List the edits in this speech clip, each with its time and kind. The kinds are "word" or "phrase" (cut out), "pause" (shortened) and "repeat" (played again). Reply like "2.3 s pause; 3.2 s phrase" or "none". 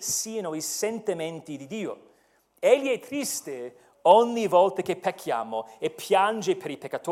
none